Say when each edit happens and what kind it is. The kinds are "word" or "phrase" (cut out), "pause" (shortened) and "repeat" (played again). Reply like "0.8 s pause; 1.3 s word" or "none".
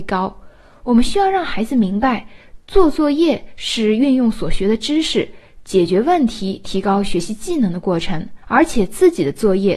8.4 s pause